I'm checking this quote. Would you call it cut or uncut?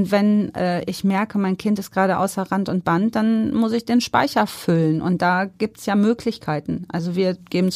uncut